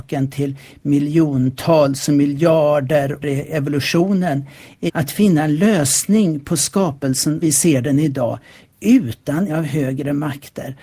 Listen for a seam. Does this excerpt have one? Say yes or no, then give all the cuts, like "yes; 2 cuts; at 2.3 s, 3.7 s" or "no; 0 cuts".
yes; 4 cuts; at 3.2 s, 4.9 s, 7.4 s, 9.5 s